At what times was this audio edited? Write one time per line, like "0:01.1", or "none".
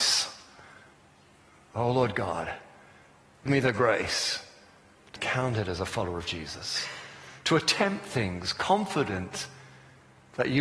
0:03.5
0:05.2

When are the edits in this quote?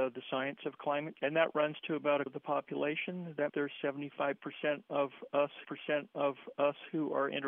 0:01.2
0:02.3
0:03.5
0:05.6

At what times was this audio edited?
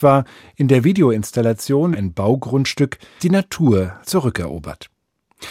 0:01.9
0:03.2
0:04.0

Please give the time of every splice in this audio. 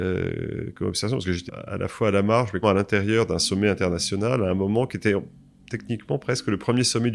0:01.5
0:02.6

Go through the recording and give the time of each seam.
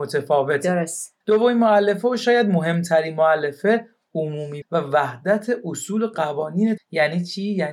0:01.2
0:04.6
0:06.8

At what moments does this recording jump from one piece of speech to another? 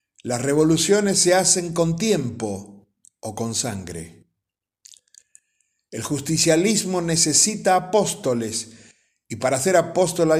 none

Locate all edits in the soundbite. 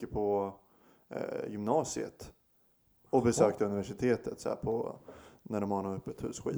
none

